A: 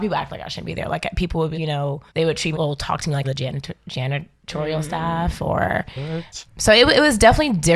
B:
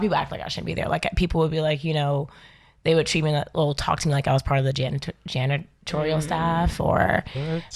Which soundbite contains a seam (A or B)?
A